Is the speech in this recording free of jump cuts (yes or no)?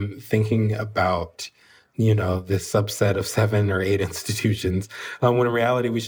yes